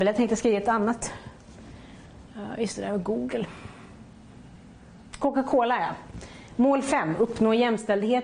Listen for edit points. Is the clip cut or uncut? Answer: uncut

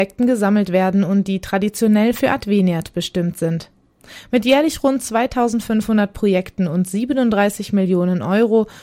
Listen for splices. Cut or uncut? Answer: uncut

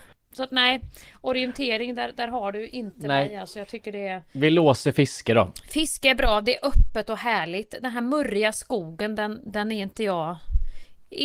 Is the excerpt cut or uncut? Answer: uncut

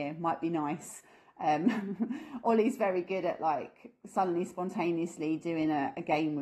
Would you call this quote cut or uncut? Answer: uncut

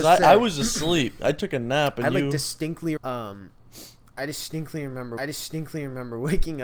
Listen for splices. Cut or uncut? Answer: cut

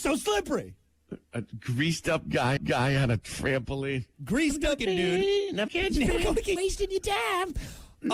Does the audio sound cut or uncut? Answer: cut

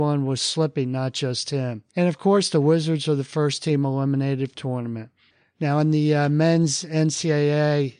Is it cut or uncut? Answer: cut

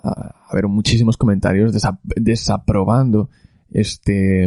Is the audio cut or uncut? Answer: uncut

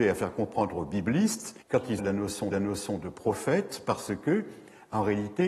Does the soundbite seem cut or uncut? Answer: cut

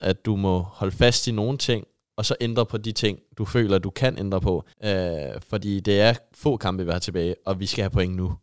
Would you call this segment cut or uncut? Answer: cut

